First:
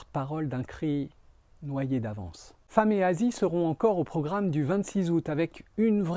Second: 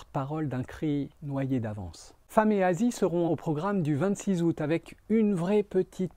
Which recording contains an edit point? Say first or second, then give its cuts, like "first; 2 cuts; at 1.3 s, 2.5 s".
second; 2 cuts; at 1.2 s, 3.3 s